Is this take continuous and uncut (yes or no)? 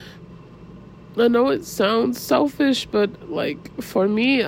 yes